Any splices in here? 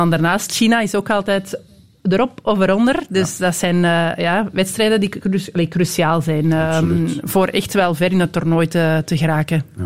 no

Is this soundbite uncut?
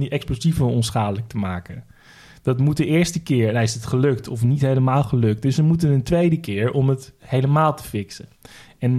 yes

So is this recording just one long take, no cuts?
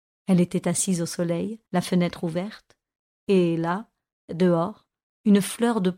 no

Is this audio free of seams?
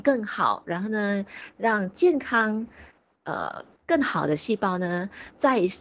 no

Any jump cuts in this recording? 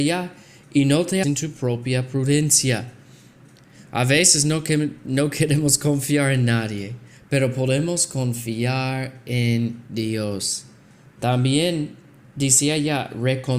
yes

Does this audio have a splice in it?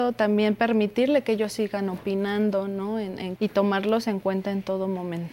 yes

